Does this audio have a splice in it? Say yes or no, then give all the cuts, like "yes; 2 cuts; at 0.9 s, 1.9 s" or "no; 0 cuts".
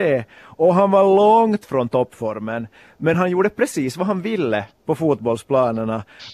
no; 0 cuts